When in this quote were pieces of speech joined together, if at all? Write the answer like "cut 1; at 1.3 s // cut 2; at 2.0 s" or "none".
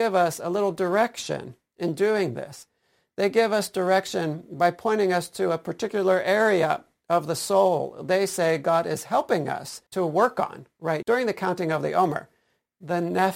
cut 1; at 9.9 s // cut 2; at 11.0 s